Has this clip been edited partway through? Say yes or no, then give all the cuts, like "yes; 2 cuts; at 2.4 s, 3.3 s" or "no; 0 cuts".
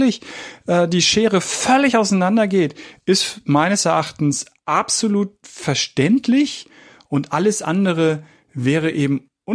no; 0 cuts